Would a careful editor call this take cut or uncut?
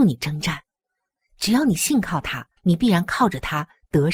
cut